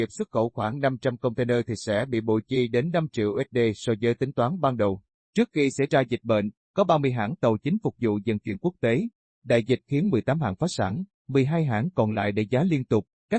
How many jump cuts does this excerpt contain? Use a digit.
0